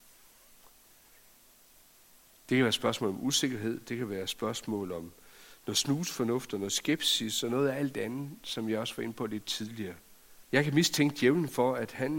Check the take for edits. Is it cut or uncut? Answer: cut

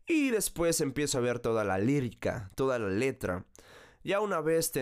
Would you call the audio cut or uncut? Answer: uncut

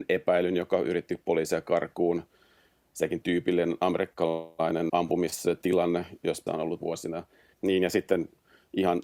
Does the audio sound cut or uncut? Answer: cut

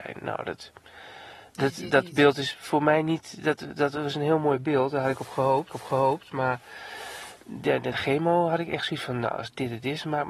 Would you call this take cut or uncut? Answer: cut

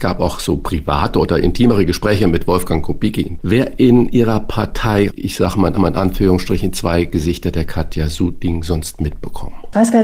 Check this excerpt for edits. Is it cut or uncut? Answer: cut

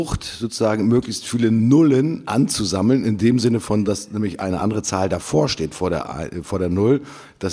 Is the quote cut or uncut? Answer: uncut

